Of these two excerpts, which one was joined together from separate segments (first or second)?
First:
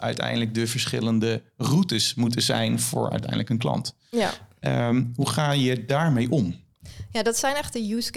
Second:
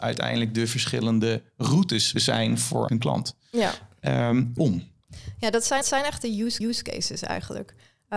second